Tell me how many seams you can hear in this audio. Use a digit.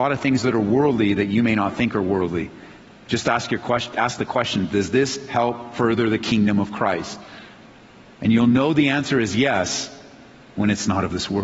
0